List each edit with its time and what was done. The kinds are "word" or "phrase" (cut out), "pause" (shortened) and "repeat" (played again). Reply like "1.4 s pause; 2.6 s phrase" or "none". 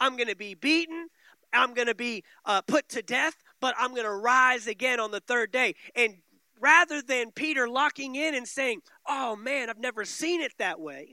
none